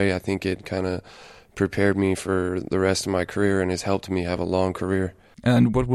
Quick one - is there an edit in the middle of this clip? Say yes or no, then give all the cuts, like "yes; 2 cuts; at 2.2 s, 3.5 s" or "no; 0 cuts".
no; 0 cuts